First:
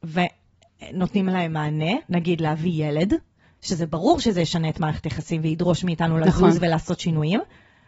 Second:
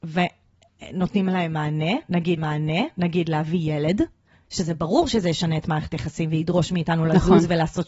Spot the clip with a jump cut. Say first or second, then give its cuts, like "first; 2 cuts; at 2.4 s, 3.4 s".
second; 1 cut; at 2.4 s